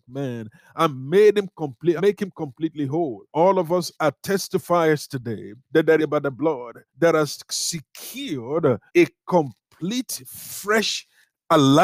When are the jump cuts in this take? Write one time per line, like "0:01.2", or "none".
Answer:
0:02.0
0:03.3
0:05.6
0:06.0
0:06.9
0:08.9